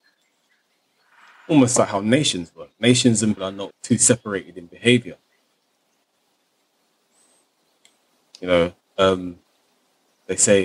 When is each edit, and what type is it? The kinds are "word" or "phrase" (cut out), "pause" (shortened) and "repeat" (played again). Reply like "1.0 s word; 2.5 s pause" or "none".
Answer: 3.4 s word; 3.7 s word